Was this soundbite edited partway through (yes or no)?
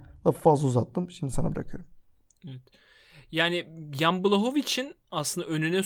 no